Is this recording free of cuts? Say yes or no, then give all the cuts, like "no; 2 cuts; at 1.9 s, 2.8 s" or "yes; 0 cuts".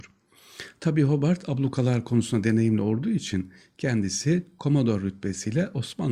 yes; 0 cuts